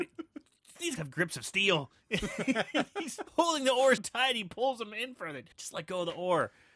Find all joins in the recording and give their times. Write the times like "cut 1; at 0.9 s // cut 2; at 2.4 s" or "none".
cut 1; at 1.0 s // cut 2; at 3.3 s // cut 3; at 4.0 s // cut 4; at 5.5 s

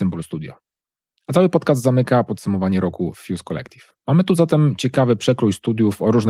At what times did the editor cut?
cut 1; at 4.0 s

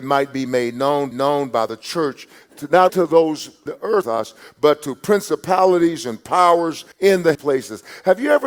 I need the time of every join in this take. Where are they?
cut 1; at 1.1 s // cut 2; at 2.9 s // cut 3; at 3.7 s // cut 4; at 4.0 s // cut 5; at 6.9 s // cut 6; at 7.3 s

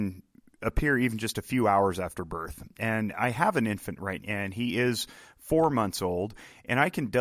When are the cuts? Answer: cut 1; at 4.2 s

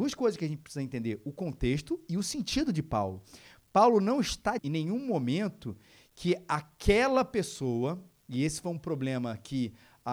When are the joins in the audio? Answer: cut 1; at 4.6 s

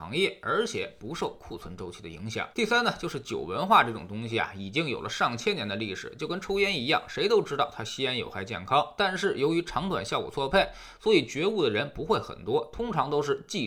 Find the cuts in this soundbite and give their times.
cut 1; at 2.5 s

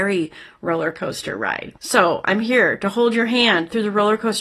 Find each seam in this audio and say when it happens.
cut 1; at 1.8 s

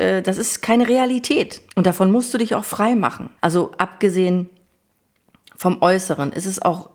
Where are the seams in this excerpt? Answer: cut 1; at 1.7 s // cut 2; at 3.4 s

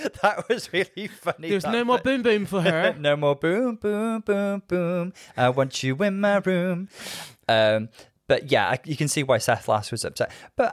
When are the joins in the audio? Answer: none

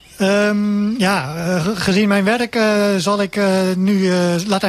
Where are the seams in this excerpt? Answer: none

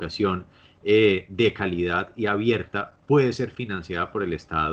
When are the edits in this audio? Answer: cut 1; at 3.0 s

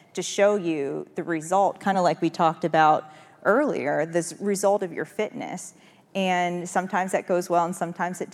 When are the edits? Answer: none

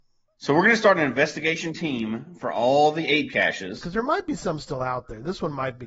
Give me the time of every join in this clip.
none

